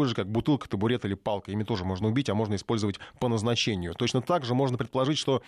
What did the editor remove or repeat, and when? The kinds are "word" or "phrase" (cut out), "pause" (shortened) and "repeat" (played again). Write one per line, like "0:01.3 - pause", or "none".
none